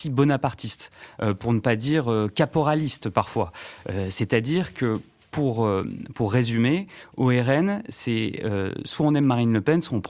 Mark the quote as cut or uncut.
uncut